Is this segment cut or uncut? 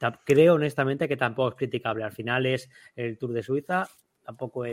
uncut